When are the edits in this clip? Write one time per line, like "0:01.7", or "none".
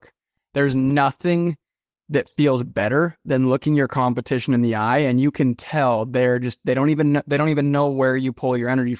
none